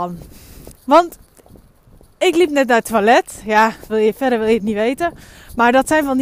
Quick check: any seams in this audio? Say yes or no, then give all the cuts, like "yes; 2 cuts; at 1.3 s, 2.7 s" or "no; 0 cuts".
yes; 2 cuts; at 3.9 s, 4.6 s